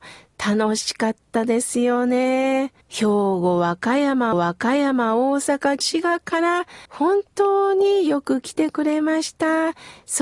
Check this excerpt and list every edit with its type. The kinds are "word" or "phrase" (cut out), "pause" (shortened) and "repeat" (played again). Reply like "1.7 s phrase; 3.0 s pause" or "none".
2.8 s pause; 4.3 s repeat; 5.8 s phrase; 6.9 s pause

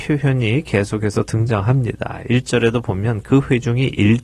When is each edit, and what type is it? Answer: none

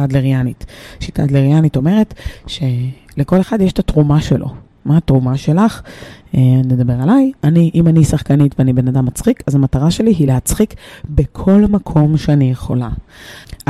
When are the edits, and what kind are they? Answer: none

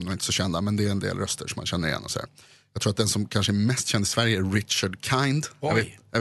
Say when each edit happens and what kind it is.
none

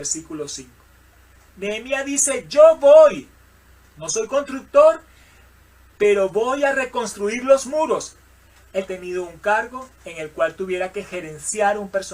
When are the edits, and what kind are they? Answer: 8.9 s phrase

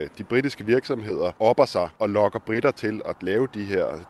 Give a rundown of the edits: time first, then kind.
1.4 s pause; 2.0 s pause

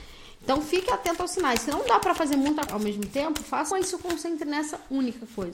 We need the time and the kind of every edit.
2.7 s word; 3.7 s word

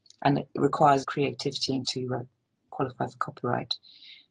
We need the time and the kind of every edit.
1.0 s phrase; 1.8 s phrase

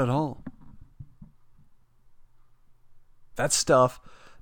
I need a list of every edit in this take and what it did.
none

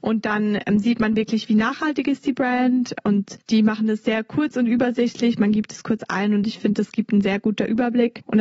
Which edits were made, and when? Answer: none

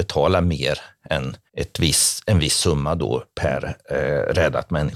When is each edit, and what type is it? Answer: 1.5 s pause

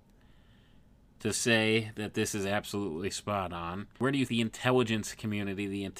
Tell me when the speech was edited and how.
3.9 s pause; 4.3 s word

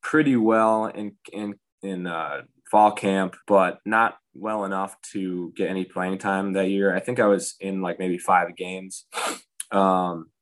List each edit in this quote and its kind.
3.4 s pause; 4.3 s pause

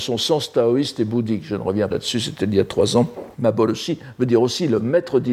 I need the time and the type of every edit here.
1.9 s word; 3.3 s pause

